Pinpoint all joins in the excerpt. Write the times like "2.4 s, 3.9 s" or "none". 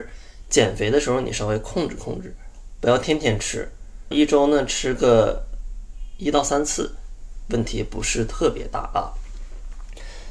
4.1 s

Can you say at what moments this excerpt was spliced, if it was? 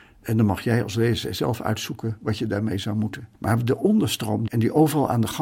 3.3 s, 4.5 s

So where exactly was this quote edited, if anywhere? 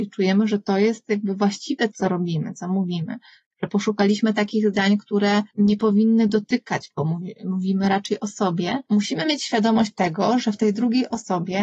1.9 s, 8.9 s

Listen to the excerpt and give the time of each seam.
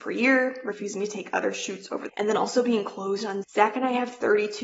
2.1 s, 3.4 s

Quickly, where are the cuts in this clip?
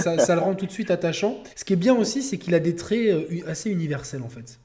1.5 s

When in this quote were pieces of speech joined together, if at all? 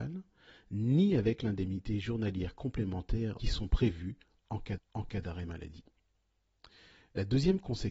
3.4 s, 4.8 s

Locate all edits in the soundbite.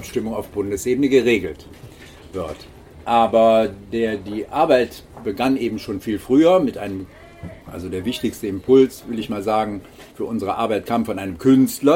7.6 s, 10.1 s

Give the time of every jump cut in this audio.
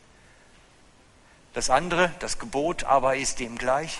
none

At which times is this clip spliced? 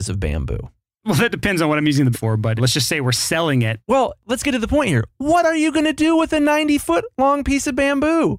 2.1 s, 2.6 s

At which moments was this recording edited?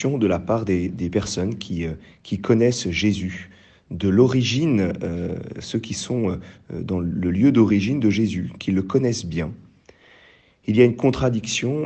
none

